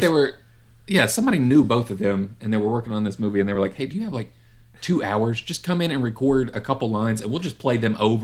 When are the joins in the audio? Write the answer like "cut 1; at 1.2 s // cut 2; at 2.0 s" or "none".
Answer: none